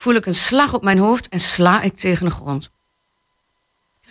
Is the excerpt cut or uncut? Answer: uncut